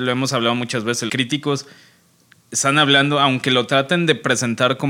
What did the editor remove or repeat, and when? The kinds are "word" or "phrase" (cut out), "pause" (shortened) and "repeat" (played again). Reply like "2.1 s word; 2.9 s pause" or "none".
1.1 s word

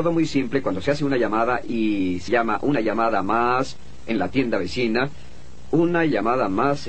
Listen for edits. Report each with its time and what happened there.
2.3 s word

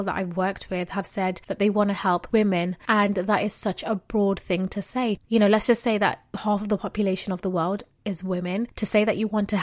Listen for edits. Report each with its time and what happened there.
none

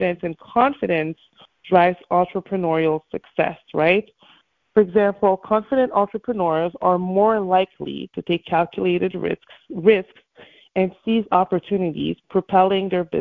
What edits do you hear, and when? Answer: none

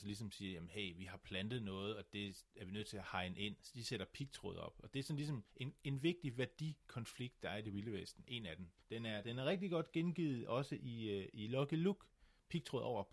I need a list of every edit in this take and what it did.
5.5 s pause; 8.8 s pause

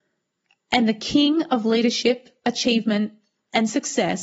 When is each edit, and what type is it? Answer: none

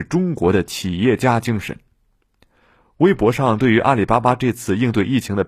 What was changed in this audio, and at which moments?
none

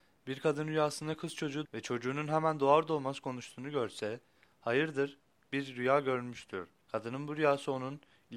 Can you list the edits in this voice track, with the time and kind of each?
1.6 s word; 5.4 s word; 6.8 s pause

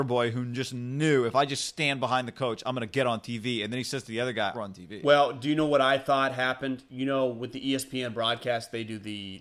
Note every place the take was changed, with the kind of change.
4.5 s phrase

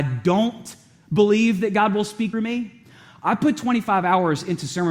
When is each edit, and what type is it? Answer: 2.3 s word

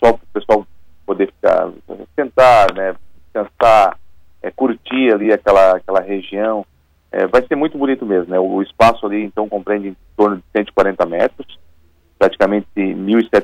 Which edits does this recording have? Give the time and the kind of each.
none

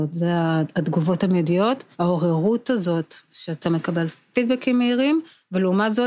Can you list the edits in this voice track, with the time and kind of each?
1.9 s pause; 3.6 s phrase

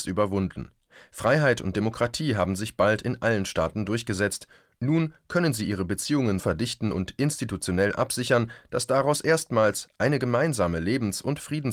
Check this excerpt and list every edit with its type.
6.4 s word

